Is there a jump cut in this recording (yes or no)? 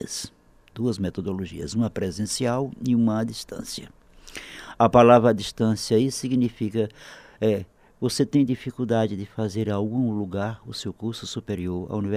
no